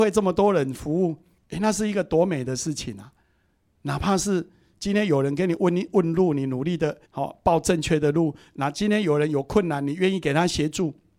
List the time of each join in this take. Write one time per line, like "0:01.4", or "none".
0:07.0